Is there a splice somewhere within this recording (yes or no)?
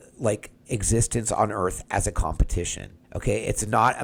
yes